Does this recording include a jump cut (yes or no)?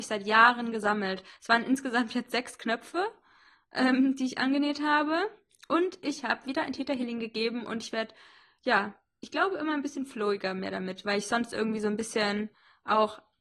no